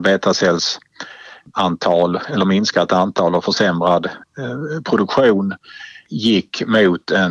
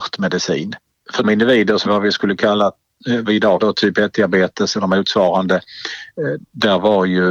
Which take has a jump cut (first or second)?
second